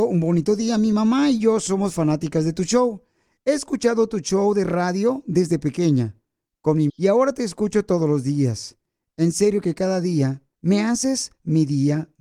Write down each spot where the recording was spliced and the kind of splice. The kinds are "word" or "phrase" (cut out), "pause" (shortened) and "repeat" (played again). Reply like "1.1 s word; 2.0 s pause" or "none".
6.9 s word; 10.5 s pause